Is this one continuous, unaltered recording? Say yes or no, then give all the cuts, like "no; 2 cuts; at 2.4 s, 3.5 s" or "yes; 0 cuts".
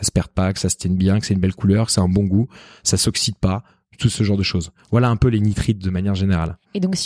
yes; 0 cuts